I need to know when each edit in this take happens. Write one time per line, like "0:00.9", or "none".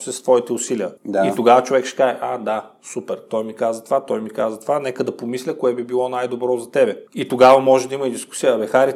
0:01.0
0:07.1